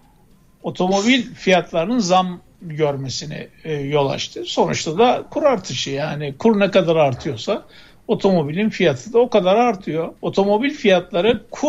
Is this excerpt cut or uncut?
cut